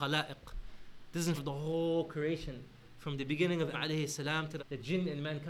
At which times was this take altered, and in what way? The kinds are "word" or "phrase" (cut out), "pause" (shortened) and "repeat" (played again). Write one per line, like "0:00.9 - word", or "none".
0:01.4 - word
0:03.7 - word
0:04.6 - phrase